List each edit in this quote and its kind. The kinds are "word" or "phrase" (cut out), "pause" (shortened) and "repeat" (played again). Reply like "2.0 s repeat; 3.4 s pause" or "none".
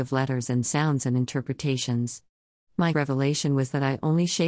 2.9 s word